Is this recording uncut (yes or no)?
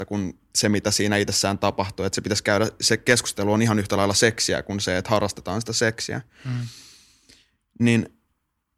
yes